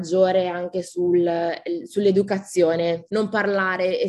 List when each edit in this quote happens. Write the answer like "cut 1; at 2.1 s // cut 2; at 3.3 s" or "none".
cut 1; at 3.1 s